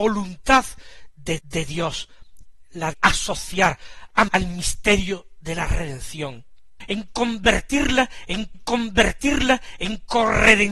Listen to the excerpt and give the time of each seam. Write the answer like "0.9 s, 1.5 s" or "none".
1.4 s, 2.9 s, 4.3 s, 8.5 s